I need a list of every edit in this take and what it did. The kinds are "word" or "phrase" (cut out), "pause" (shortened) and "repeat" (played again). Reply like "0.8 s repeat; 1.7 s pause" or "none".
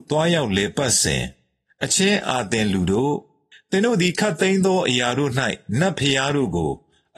none